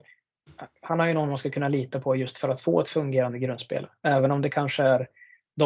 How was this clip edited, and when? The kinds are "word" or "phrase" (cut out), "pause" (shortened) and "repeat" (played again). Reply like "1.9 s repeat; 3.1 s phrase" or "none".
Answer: none